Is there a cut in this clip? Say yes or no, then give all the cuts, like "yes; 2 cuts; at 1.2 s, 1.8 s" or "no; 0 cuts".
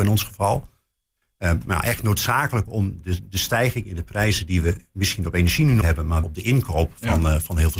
yes; 3 cuts; at 3.0 s, 5.8 s, 6.2 s